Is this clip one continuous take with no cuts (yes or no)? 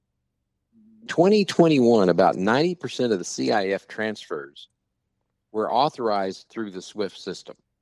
no